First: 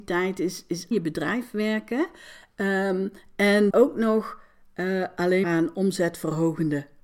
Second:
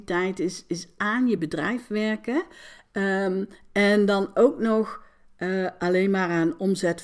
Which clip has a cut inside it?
first; 3 cuts; at 0.9 s, 3.7 s, 5.4 s

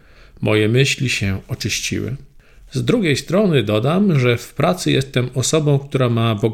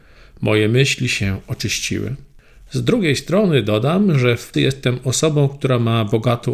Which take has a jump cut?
second; 1 cut; at 4.5 s

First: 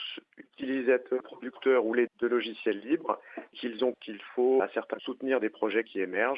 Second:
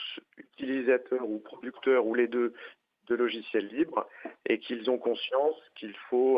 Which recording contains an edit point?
first; 6 cuts; at 1.2 s, 2.1 s, 3.5 s, 3.9 s, 4.6 s, 5.0 s

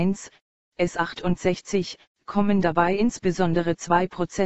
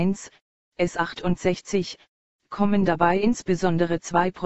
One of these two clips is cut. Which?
first; 1 cut; at 2.1 s

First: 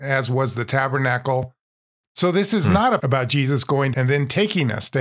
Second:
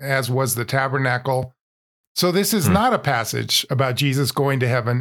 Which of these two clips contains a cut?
first; 2 cuts; at 3.0 s, 3.9 s

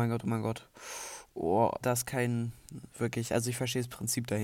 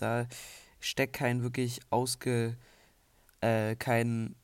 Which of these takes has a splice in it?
first; 1 cut; at 1.8 s

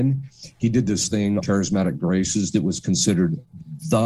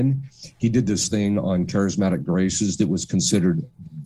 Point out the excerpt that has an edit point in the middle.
first; 1 cut; at 1.4 s

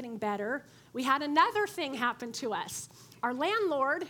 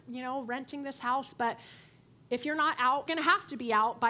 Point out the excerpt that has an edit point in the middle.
second; 1 cut; at 3.1 s

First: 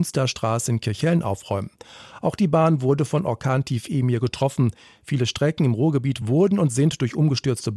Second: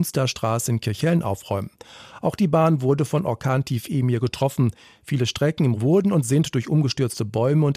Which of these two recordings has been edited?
second; 1 cut; at 5.7 s

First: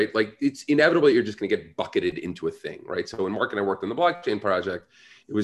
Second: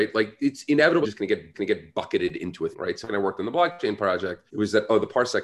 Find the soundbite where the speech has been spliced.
second; 5 cuts; at 1.0 s, 1.5 s, 2.7 s, 3.1 s, 4.5 s

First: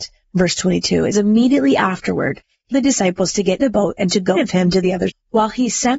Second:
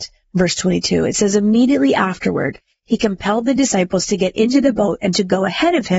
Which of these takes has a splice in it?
first; 5 cuts; at 1.1 s, 2.7 s, 3.6 s, 4.4 s, 5.1 s

